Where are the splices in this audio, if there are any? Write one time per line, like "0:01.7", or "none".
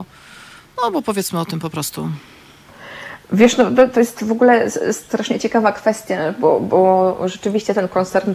none